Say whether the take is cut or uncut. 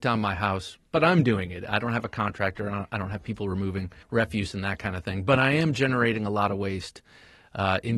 cut